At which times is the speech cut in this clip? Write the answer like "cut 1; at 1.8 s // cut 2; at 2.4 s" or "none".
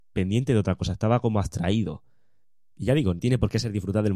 cut 1; at 3.2 s

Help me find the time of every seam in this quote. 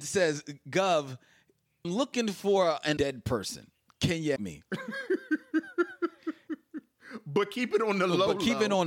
cut 1; at 1.8 s // cut 2; at 3.0 s // cut 3; at 4.4 s

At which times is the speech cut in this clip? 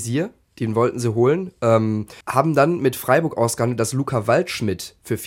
cut 1; at 2.2 s

